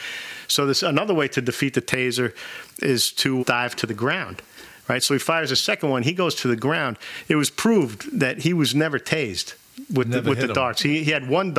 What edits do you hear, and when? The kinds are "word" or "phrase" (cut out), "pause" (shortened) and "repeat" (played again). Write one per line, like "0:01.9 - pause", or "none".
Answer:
0:03.4 - word